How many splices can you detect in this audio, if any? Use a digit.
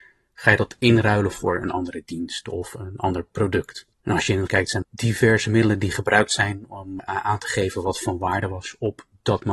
4